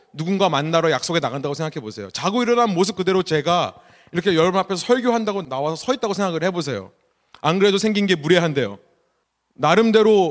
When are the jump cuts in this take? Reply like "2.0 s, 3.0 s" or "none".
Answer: none